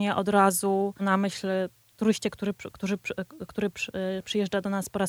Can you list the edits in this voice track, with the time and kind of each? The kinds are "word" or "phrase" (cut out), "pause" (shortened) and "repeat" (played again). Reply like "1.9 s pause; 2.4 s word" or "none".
1.0 s word